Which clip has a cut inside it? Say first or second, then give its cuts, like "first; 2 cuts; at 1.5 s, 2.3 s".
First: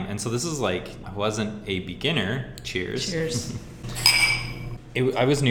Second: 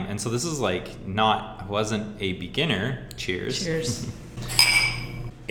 first; 1 cut; at 1.0 s